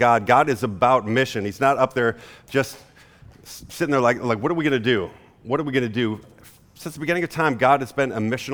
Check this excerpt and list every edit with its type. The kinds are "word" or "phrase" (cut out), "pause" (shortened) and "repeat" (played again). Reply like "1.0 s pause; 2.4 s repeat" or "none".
none